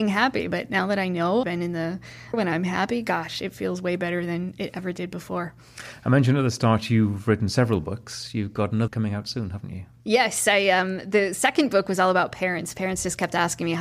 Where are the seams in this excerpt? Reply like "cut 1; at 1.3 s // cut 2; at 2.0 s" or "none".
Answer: cut 1; at 1.4 s // cut 2; at 2.3 s // cut 3; at 8.9 s